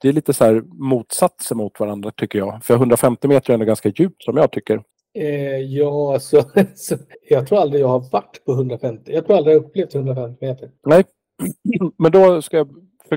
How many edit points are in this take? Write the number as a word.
three